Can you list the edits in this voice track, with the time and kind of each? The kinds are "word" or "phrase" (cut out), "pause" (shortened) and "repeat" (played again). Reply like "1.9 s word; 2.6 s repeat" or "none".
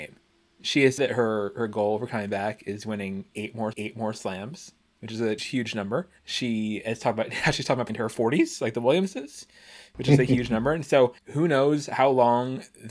1.0 s word; 3.7 s repeat; 5.4 s word; 6.2 s pause; 7.9 s word; 11.2 s pause